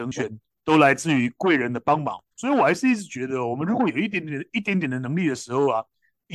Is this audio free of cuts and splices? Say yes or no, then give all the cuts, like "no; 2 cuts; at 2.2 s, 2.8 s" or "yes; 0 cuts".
no; 1 cut; at 2.3 s